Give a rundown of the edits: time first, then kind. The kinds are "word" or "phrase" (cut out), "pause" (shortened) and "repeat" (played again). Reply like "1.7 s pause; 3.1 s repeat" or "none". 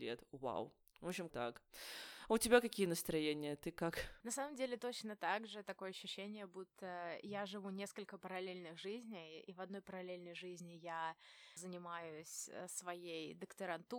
1.3 s word; 11.6 s word